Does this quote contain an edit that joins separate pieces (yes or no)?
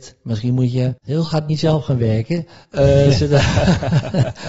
yes